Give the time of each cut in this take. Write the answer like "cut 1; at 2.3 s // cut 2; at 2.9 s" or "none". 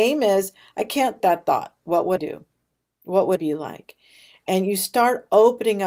cut 1; at 1.2 s // cut 2; at 2.2 s // cut 3; at 3.4 s